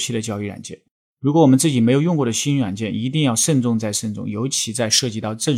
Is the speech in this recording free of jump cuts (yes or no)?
no